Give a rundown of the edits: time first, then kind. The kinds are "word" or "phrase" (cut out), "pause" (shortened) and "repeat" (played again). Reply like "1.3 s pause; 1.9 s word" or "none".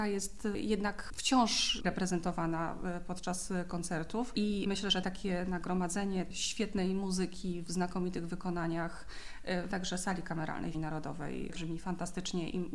1.8 s word; 9.7 s word; 10.7 s word; 11.5 s phrase